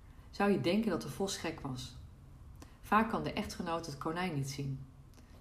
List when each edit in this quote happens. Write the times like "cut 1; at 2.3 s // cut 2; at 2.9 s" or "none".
none